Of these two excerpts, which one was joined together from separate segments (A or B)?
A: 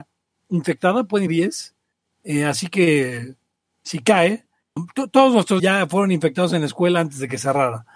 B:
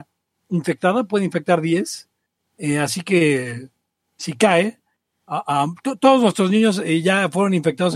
A